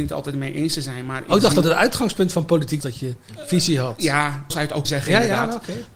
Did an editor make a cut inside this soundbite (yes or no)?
yes